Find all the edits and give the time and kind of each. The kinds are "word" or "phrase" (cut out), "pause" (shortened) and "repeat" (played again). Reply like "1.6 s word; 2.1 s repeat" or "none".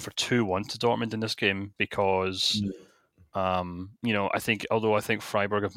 1.8 s word; 4.0 s pause